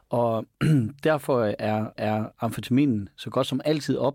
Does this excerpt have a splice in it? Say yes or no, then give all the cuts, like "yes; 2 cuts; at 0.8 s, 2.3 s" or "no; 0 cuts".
yes; 1 cut; at 2.0 s